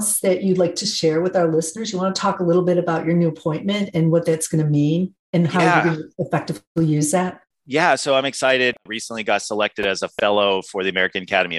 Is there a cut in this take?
yes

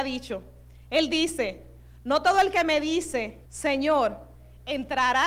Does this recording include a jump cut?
yes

